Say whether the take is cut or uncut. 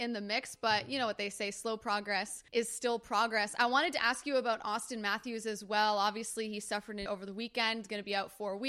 cut